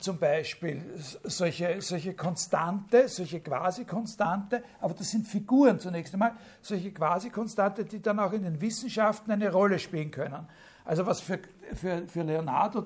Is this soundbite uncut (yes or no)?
yes